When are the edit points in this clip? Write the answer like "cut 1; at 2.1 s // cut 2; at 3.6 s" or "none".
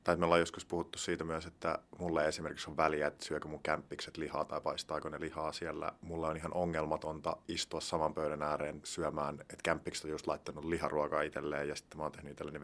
none